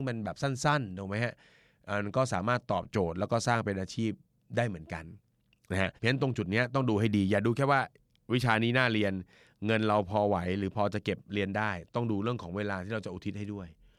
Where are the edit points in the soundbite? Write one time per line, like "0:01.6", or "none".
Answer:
0:06.0